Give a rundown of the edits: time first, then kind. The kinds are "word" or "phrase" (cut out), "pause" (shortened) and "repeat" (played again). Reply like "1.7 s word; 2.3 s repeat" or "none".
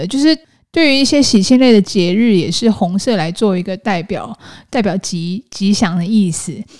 none